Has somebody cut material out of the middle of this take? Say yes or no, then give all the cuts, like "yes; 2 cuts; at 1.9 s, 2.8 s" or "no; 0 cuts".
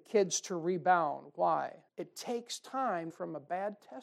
yes; 2 cuts; at 1.9 s, 3.1 s